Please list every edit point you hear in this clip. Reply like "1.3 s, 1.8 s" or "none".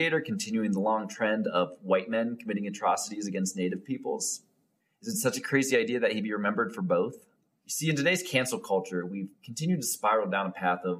none

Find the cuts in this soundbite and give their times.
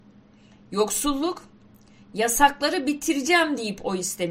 none

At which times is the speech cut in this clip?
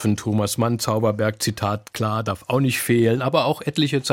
none

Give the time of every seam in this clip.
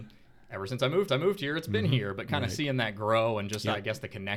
1.1 s

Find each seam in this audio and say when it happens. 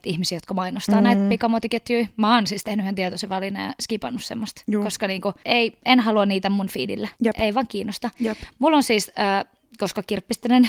7.1 s

